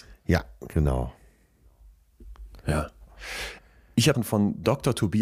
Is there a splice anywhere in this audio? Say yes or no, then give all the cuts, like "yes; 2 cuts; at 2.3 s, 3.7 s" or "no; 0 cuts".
yes; 1 cut; at 4.1 s